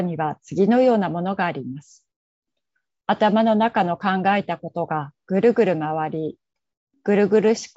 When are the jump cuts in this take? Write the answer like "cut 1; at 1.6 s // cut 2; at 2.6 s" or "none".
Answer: none